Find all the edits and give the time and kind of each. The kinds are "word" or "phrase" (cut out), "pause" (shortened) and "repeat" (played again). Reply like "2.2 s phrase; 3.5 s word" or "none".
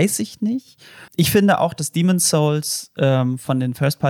1.1 s pause